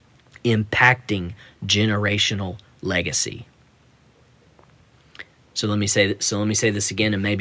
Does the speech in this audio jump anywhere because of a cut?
no; 0 cuts

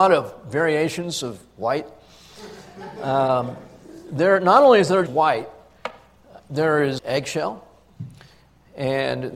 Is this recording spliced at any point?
yes; 2 cuts; at 5.1 s, 7.0 s

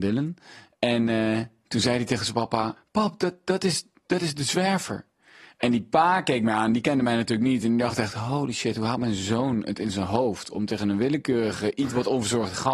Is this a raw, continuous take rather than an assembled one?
yes; 0 cuts

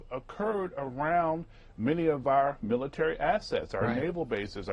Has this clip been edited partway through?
no; 0 cuts

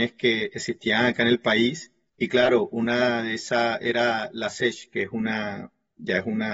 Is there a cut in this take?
yes; 1 cut; at 2.1 s

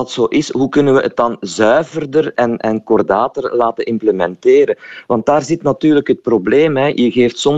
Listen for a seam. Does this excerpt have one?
no; 0 cuts

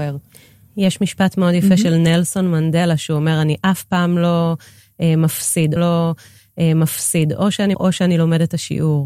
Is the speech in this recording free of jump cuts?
no; 2 cuts; at 5.8 s, 7.7 s

